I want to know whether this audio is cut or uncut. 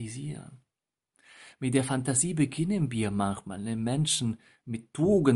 uncut